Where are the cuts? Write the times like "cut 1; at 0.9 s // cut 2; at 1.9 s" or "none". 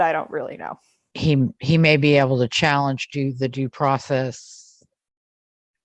none